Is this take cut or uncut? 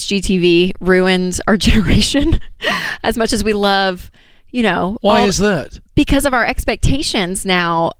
uncut